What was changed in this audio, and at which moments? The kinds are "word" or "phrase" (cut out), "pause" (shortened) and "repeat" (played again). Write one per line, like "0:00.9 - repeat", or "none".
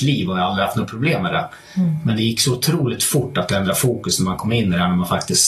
none